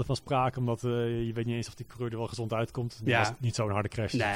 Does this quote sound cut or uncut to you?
uncut